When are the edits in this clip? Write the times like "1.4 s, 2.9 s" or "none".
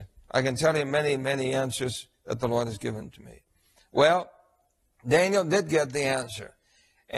none